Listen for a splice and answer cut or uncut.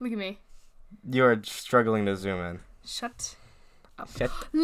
uncut